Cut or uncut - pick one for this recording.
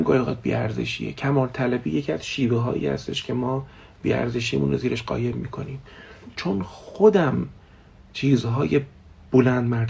uncut